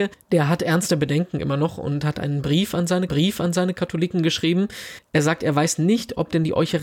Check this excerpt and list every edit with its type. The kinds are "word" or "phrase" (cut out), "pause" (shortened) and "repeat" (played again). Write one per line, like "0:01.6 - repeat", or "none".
0:03.1 - repeat

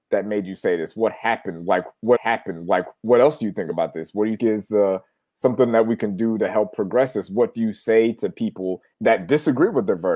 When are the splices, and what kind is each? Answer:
0:02.1 - repeat
0:04.4 - word
0:08.9 - pause

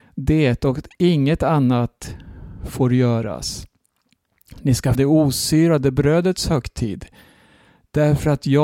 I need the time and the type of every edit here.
0:04.9 - word

